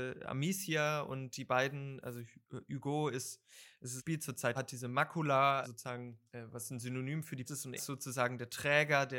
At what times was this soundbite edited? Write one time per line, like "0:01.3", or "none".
0:02.0
0:04.0
0:04.6
0:05.6
0:06.3
0:07.5
0:07.8